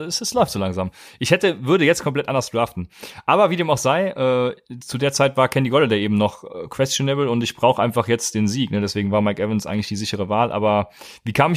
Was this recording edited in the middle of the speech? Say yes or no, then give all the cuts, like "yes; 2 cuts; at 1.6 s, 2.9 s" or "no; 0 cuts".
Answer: no; 0 cuts